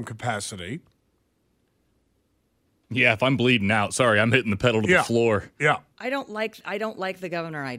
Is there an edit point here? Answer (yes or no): no